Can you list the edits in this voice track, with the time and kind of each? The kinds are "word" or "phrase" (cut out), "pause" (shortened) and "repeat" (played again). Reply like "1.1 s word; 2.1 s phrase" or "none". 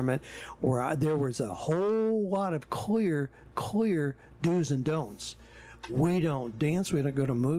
3.5 s repeat